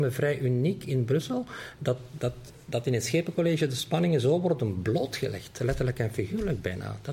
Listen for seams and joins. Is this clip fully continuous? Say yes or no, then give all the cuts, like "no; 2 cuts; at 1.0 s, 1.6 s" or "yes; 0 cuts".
yes; 0 cuts